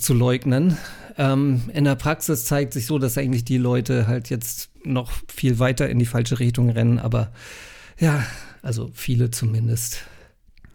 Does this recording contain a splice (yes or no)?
yes